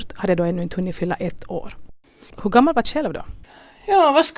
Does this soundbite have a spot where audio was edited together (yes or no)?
yes